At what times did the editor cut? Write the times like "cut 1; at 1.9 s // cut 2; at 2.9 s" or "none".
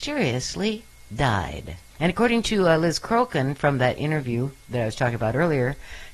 cut 1; at 1.9 s

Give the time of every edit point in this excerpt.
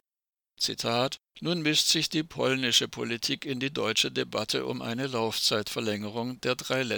cut 1; at 1.3 s

